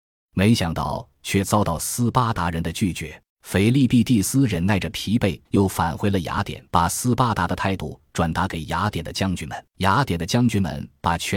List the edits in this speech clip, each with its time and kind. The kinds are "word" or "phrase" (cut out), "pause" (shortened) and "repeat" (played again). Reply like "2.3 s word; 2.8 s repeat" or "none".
3.3 s pause; 5.4 s pause; 6.7 s pause; 9.7 s pause